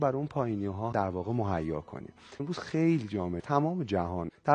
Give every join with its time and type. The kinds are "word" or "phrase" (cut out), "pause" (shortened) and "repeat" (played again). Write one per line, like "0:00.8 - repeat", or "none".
0:00.9 - word
0:02.4 - word
0:03.4 - phrase